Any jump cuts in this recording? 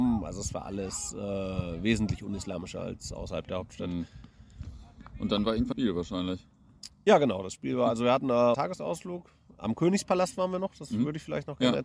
yes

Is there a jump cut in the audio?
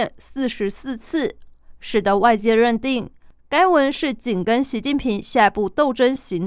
no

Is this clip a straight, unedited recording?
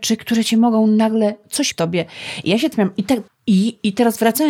no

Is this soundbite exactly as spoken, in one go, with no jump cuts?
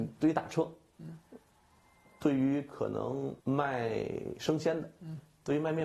no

